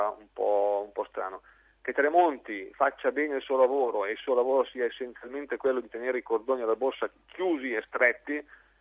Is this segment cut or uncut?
uncut